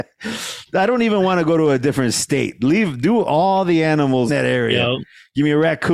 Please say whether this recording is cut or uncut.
cut